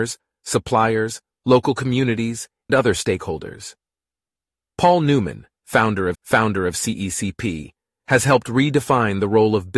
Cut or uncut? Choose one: cut